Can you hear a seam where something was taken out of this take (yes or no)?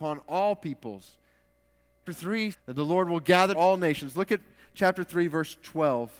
yes